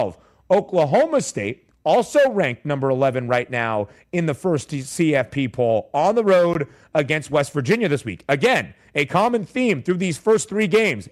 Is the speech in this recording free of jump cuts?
yes; 0 cuts

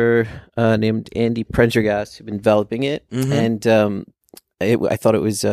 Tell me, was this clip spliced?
no; 0 cuts

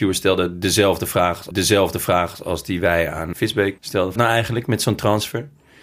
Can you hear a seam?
yes; 4 cuts; at 1.5 s, 3.3 s, 3.8 s, 4.2 s

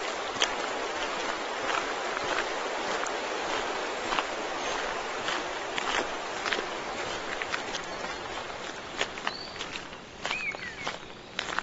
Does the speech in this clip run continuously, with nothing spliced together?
yes; 0 cuts

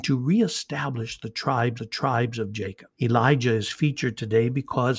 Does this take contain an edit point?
yes; 2 cuts; at 1.8 s, 2.9 s

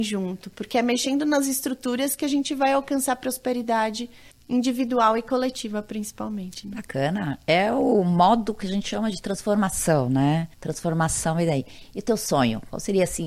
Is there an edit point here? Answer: yes; 2 cuts; at 4.3 s, 10.5 s

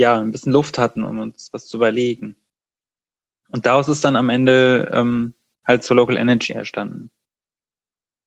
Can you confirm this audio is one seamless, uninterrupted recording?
yes; 0 cuts

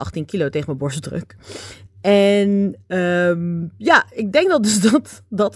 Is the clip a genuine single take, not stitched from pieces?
yes; 0 cuts

